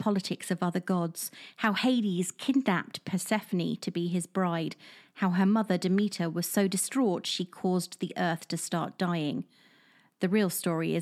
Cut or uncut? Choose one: uncut